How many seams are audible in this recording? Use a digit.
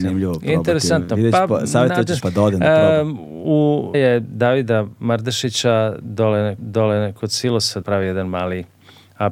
4